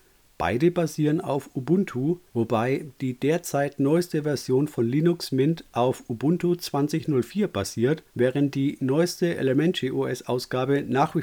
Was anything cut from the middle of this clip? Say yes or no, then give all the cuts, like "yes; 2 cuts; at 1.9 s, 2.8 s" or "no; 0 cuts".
yes; 2 cuts; at 2.3 s, 8.1 s